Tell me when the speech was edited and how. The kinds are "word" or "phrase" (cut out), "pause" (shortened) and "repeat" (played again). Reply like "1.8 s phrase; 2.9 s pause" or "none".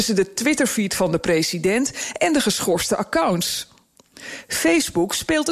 none